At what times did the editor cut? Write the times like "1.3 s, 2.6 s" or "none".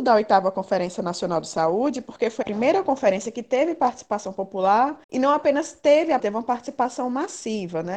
2.4 s, 5.0 s, 6.2 s